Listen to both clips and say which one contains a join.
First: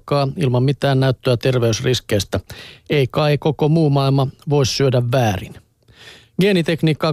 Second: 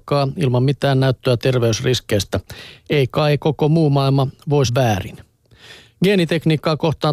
second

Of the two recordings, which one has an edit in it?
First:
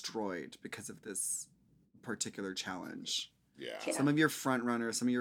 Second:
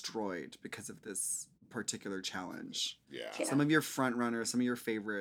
second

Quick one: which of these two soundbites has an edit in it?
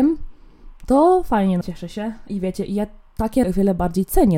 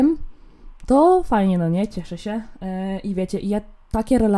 first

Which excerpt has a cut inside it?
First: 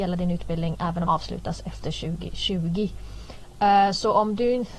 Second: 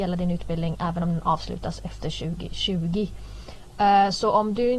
first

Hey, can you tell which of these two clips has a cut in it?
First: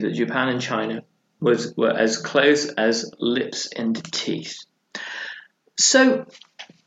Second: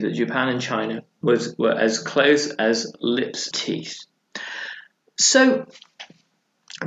second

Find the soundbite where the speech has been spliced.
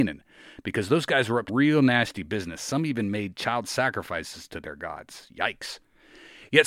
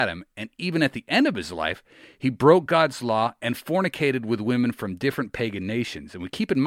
first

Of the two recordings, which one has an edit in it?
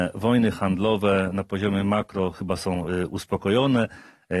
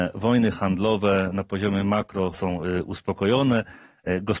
second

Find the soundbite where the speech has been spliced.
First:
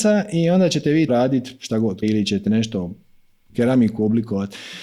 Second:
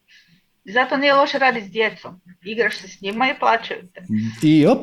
first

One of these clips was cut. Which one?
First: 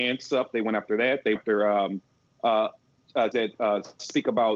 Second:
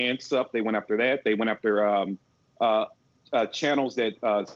first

